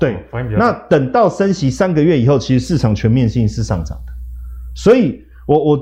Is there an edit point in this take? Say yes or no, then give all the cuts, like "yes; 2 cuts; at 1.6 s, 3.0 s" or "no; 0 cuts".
no; 0 cuts